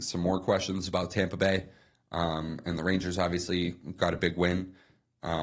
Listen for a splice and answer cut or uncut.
uncut